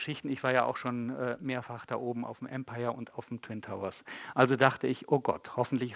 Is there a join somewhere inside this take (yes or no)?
no